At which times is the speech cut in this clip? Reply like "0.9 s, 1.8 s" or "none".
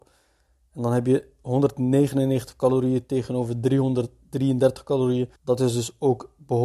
5.4 s